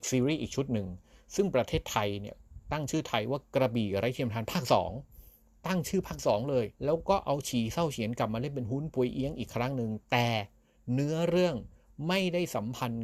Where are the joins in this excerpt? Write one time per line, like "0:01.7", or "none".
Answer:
0:06.7